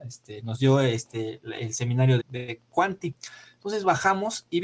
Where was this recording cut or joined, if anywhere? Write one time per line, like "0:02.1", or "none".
0:02.2